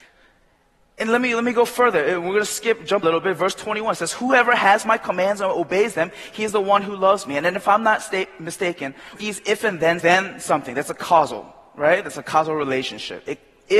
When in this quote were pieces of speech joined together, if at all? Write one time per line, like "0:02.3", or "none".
0:03.0
0:09.2
0:10.0